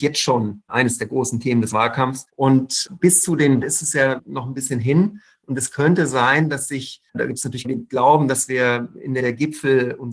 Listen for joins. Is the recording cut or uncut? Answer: cut